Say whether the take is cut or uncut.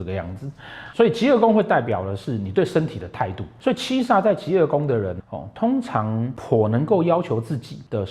cut